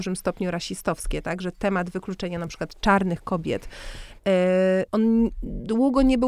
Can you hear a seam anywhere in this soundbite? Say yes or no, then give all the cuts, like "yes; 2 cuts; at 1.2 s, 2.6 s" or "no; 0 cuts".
no; 0 cuts